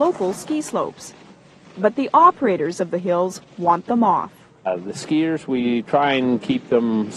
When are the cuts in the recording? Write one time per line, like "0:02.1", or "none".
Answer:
none